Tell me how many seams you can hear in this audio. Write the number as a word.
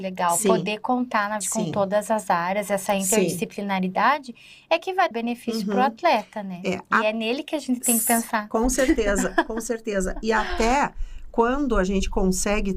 two